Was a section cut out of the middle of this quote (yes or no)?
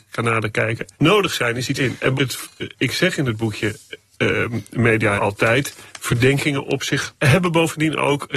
yes